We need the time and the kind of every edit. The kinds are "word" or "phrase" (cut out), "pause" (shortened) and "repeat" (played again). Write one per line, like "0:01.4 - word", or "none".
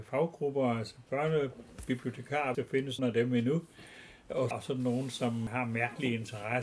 0:02.5 - word
0:03.0 - word
0:04.5 - word